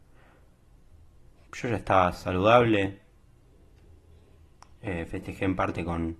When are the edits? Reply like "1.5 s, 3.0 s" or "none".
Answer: none